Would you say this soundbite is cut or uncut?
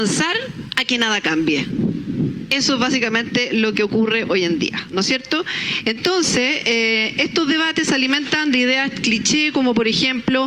uncut